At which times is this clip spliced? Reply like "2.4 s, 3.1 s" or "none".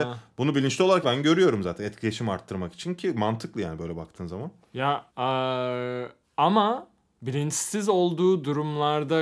1.0 s, 5.1 s